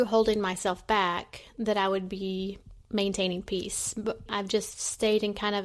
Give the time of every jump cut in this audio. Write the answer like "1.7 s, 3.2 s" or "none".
2.8 s, 4.3 s